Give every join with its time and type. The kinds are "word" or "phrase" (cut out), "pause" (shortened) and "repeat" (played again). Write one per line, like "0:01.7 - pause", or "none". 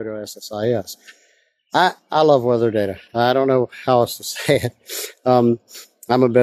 none